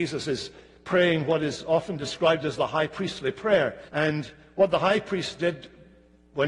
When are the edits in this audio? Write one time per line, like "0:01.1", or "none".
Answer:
0:03.9